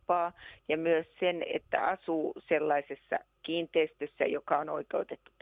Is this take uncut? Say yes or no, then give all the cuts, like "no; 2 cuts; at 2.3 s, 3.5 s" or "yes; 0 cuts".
yes; 0 cuts